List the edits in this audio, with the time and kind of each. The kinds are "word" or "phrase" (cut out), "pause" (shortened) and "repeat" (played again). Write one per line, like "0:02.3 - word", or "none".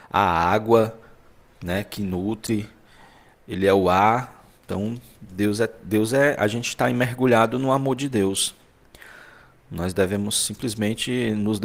0:04.6 - pause